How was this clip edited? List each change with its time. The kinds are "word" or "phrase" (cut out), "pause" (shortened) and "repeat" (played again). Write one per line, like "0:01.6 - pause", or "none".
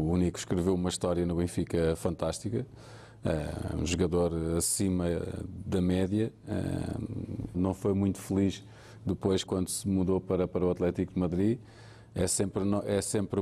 0:07.5 - word
0:09.5 - word